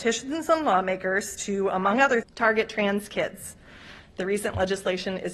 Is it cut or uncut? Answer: cut